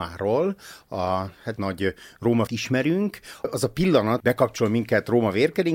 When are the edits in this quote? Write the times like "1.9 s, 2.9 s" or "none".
1.6 s, 2.5 s, 4.2 s